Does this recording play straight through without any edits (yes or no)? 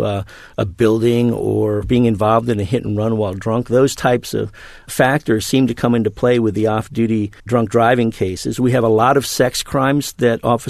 no